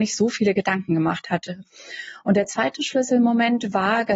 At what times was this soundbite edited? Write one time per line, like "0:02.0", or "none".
none